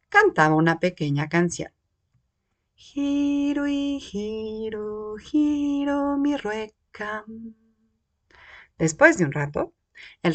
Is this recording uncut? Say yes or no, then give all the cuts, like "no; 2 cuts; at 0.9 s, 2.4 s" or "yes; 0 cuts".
yes; 0 cuts